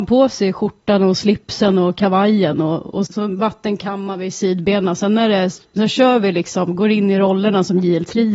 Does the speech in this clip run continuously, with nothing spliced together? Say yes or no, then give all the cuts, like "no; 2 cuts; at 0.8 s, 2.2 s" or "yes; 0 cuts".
no; 1 cut; at 3.1 s